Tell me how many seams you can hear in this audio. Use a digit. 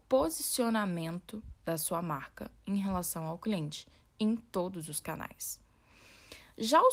1